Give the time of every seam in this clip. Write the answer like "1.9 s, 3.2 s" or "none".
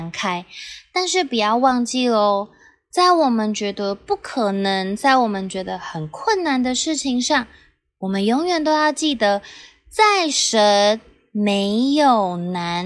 none